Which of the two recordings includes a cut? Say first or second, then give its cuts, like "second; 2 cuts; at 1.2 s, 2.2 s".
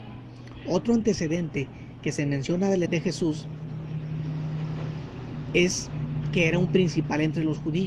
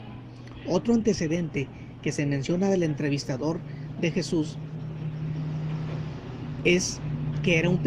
first; 1 cut; at 2.9 s